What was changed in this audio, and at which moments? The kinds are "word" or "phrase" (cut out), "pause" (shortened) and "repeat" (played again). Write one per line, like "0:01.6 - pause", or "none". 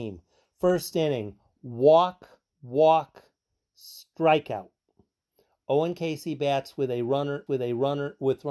0:02.5 - pause
0:07.5 - repeat